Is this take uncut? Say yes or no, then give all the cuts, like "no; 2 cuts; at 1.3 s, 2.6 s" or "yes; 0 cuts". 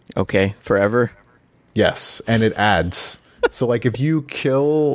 yes; 0 cuts